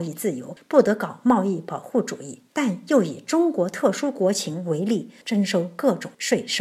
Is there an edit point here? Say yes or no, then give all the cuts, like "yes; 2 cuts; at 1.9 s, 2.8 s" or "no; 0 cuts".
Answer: yes; 1 cut; at 2.5 s